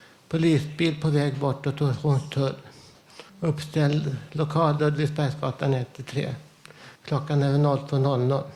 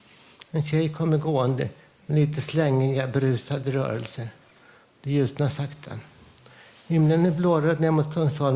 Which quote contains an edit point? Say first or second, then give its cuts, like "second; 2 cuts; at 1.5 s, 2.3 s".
first; 3 cuts; at 3.3 s, 4.8 s, 6.9 s